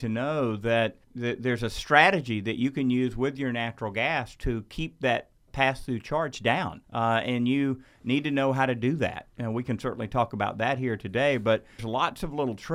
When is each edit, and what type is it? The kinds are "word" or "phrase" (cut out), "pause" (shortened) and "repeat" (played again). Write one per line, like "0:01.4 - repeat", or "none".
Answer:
0:01.0 - pause
0:05.5 - word
0:06.8 - pause
0:11.8 - word